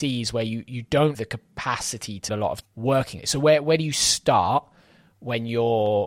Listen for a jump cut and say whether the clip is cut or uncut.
cut